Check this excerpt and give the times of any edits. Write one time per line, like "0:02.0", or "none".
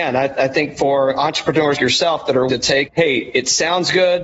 0:01.8
0:02.5
0:02.9